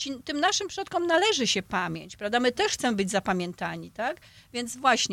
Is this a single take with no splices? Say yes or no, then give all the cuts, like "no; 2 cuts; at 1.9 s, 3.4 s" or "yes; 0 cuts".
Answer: yes; 0 cuts